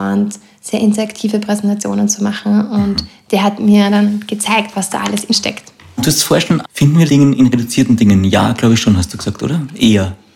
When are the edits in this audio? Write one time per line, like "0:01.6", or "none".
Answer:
0:05.3
0:06.6
0:07.1